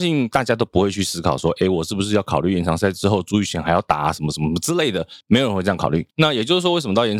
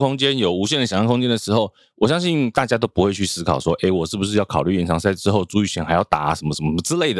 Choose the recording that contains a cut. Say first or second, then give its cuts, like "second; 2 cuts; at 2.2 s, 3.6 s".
first; 2 cuts; at 5.2 s, 6.1 s